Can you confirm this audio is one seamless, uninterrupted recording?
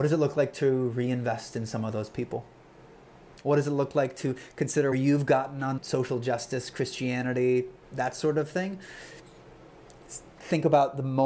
no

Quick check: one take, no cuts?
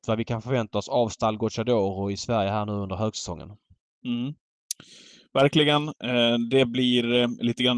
yes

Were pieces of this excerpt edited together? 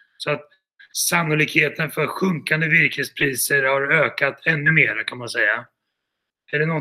no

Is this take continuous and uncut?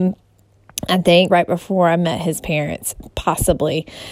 no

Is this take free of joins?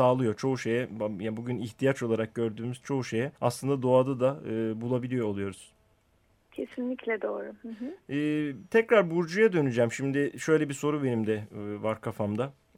no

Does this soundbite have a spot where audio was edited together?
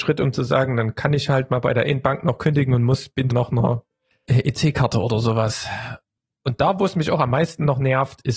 yes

